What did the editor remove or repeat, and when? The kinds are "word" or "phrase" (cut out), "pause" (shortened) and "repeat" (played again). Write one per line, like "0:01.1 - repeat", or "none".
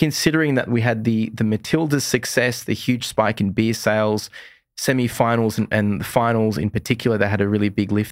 none